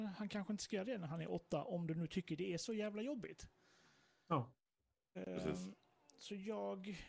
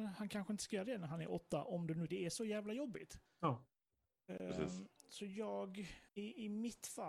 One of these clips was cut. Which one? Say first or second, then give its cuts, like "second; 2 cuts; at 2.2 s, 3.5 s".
second; 4 cuts; at 2.1 s, 3.3 s, 5.0 s, 6.1 s